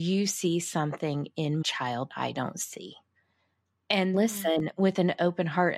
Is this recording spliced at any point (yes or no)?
yes